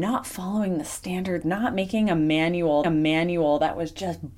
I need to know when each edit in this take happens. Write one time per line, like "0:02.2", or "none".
0:01.4
0:02.8